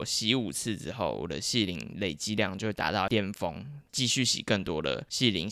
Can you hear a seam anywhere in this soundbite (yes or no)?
no